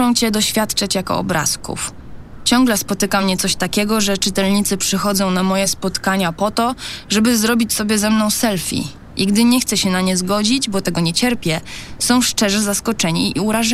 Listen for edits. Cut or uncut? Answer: uncut